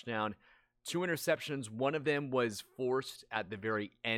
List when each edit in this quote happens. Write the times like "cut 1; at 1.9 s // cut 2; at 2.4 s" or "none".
none